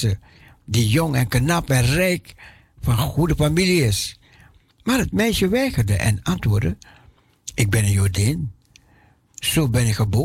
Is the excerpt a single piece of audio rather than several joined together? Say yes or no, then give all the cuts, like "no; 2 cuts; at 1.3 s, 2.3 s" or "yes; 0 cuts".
yes; 0 cuts